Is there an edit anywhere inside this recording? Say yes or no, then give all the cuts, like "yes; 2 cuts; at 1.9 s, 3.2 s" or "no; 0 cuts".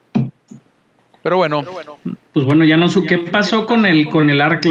no; 0 cuts